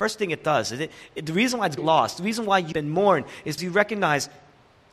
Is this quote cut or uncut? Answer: cut